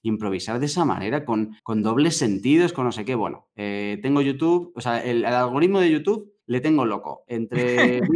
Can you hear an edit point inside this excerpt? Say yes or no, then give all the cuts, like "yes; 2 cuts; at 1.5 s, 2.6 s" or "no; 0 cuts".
yes; 2 cuts; at 1.6 s, 6.4 s